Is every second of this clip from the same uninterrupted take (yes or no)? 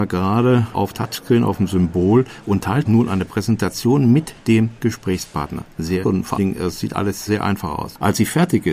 no